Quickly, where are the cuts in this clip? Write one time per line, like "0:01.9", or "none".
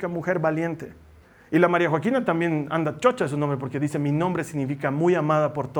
0:01.2